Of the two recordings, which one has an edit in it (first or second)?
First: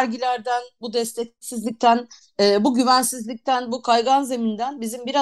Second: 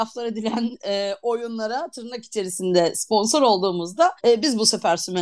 second